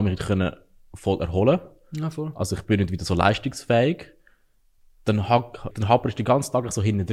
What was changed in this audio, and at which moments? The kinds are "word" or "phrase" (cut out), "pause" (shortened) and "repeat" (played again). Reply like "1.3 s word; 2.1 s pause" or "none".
5.7 s word